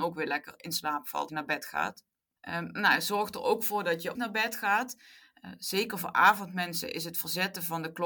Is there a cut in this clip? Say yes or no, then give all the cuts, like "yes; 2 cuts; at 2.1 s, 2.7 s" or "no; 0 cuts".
yes; 2 cuts; at 1.3 s, 4.1 s